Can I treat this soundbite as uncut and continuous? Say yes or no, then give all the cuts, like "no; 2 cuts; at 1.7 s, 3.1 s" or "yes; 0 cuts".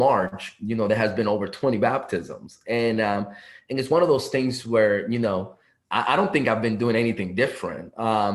yes; 0 cuts